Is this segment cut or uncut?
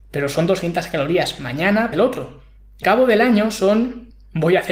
cut